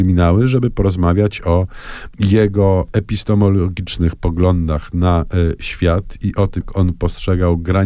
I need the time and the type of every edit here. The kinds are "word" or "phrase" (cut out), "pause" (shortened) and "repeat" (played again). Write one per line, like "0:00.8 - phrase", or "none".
0:06.6 - word